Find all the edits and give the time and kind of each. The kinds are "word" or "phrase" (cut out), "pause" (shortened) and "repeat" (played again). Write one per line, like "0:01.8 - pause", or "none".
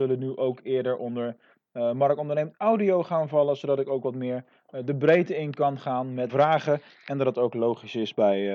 0:06.3 - word